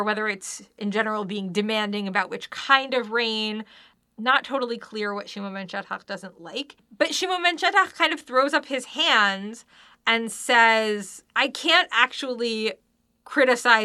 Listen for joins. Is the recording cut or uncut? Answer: uncut